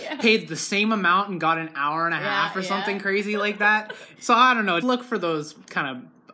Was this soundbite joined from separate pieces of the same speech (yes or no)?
yes